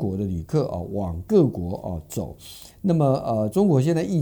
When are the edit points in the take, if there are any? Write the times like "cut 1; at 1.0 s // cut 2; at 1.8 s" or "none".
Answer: none